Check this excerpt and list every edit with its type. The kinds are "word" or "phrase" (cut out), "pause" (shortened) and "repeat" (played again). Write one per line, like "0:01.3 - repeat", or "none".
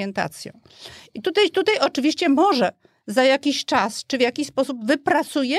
none